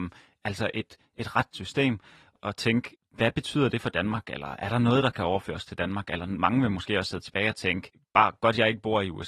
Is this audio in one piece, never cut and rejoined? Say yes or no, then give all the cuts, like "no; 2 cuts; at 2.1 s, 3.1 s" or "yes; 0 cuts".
no; 1 cut; at 1.5 s